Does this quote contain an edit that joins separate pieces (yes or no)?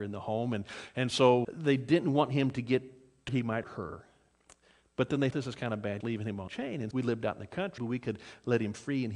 yes